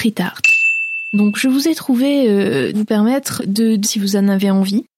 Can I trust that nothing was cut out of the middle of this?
no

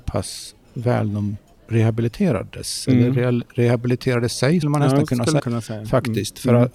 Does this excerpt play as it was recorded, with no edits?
no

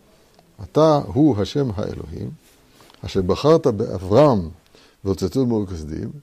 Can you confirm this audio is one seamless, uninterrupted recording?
yes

